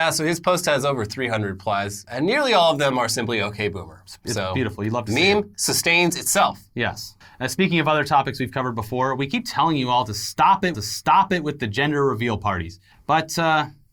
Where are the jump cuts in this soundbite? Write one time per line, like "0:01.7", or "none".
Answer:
0:02.1
0:07.2
0:10.7
0:12.9